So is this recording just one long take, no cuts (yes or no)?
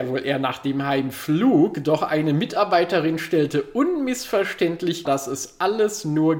no